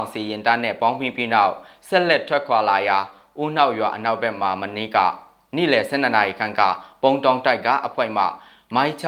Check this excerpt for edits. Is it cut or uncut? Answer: uncut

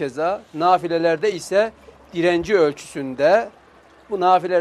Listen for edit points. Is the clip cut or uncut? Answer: uncut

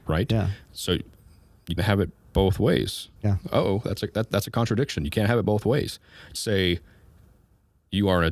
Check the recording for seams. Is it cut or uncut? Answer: cut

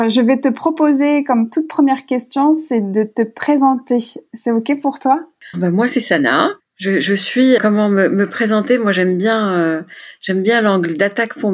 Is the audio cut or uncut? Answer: cut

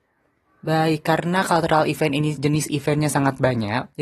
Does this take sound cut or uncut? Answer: uncut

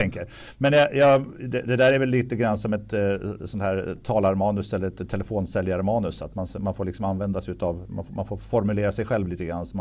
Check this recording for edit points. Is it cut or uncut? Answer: uncut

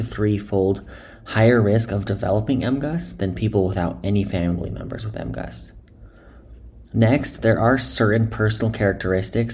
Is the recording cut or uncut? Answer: uncut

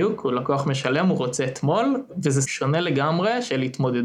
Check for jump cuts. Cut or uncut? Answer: cut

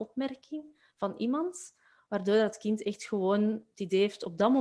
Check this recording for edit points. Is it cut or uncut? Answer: uncut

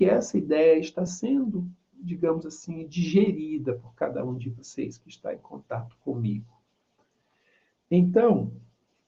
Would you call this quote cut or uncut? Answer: uncut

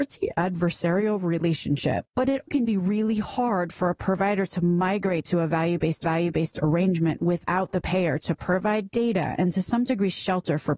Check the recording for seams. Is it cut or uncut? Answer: cut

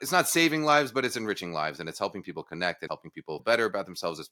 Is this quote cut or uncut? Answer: cut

